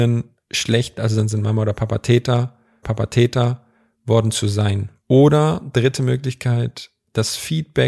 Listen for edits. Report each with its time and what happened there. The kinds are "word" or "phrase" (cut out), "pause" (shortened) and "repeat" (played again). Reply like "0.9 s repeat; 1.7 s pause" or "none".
1.0 s word; 2.8 s repeat